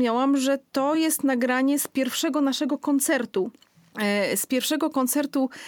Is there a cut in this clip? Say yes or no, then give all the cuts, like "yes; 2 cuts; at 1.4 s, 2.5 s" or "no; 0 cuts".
no; 0 cuts